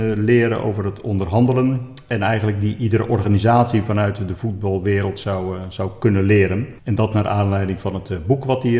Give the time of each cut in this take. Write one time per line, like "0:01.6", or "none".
0:06.8